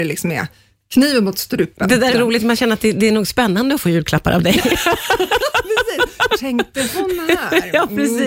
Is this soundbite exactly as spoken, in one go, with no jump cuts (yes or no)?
no